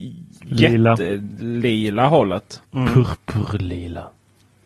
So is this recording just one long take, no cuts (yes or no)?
no